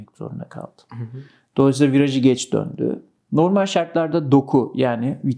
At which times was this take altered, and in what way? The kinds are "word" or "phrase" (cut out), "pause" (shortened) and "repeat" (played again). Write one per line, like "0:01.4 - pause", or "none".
none